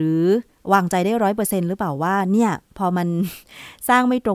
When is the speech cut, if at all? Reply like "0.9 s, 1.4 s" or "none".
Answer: none